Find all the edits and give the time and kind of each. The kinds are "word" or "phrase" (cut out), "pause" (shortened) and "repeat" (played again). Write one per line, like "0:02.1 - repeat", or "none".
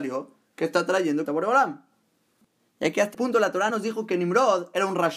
0:01.2 - word
0:03.1 - word
0:03.7 - word

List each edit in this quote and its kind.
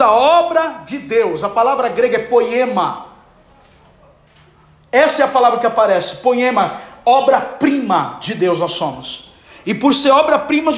none

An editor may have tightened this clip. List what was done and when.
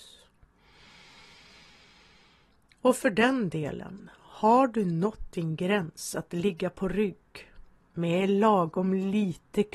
0:07.8 - pause

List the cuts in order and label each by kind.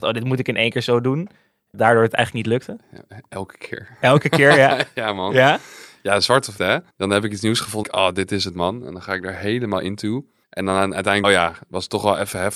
0:01.7 - word
0:06.6 - word
0:06.9 - pause
0:07.8 - word
0:10.4 - pause
0:11.2 - phrase

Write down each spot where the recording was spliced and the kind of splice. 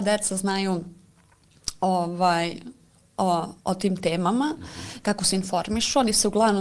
0:03.6 - pause

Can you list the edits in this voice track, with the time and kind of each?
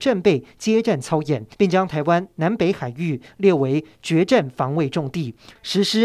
0:01.5 - pause

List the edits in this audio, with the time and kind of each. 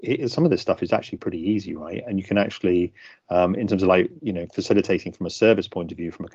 none

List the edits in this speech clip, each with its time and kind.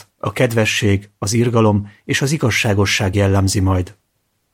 none

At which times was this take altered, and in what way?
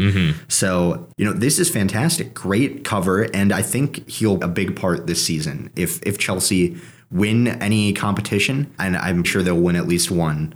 0:01.1 - pause
0:04.4 - word
0:08.8 - pause
0:09.2 - word

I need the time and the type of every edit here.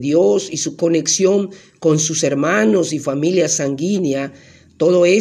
none

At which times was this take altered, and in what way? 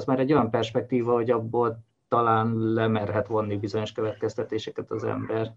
none

